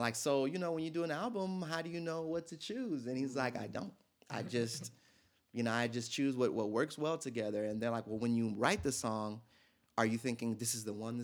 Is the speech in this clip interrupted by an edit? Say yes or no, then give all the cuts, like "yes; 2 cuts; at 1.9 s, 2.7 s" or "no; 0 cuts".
no; 0 cuts